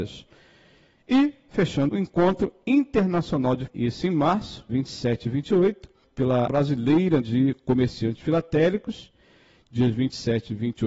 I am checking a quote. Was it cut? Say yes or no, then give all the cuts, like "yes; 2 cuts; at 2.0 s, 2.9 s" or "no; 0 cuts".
yes; 6 cuts; at 1.9 s, 3.7 s, 4.7 s, 6.0 s, 6.5 s, 7.2 s